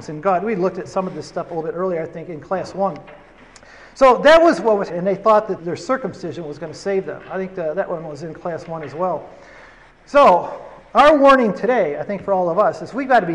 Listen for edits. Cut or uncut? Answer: cut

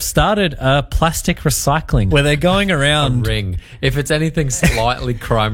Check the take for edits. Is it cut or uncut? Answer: cut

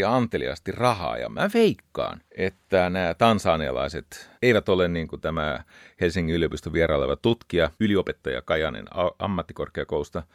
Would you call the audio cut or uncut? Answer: cut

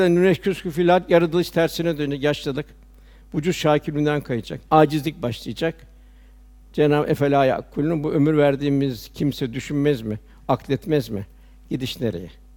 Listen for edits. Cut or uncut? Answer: uncut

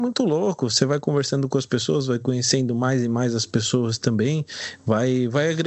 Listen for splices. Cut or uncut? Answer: uncut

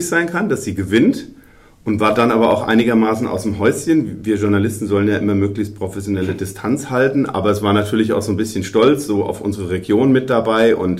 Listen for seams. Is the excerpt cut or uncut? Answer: uncut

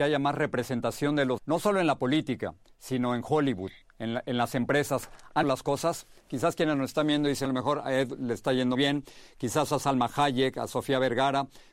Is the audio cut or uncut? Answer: cut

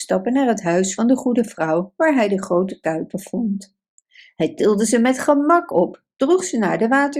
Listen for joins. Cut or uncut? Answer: uncut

